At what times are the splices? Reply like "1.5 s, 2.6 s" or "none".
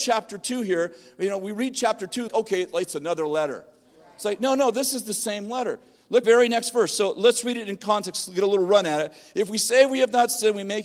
2.3 s, 6.2 s